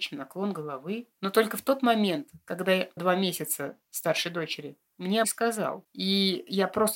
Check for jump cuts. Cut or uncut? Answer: cut